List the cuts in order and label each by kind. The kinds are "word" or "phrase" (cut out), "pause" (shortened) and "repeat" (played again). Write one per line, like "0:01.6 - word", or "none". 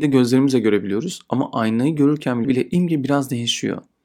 0:02.4 - phrase